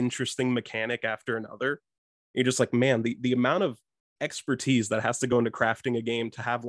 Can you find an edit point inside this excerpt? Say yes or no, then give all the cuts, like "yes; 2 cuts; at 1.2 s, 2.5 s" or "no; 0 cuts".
no; 0 cuts